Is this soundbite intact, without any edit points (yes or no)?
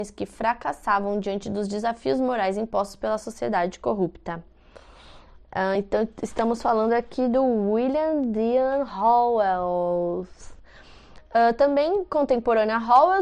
yes